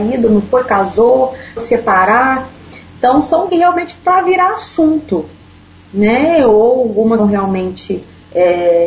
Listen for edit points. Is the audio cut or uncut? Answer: cut